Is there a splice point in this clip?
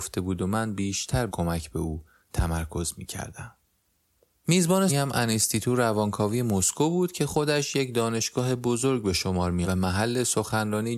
yes; 3 cuts; at 1.3 s, 4.9 s, 9.6 s

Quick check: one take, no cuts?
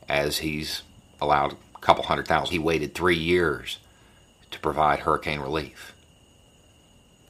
no; 2 cuts; at 1.7 s, 2.5 s

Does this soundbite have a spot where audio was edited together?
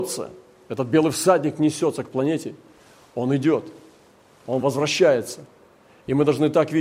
no; 0 cuts

